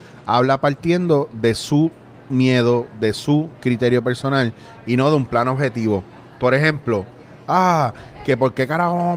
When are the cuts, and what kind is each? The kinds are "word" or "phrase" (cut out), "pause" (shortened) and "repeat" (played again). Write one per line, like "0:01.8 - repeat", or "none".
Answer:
none